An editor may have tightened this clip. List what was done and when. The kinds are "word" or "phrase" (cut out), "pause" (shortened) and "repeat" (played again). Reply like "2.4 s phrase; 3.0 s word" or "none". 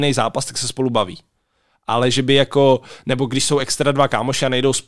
none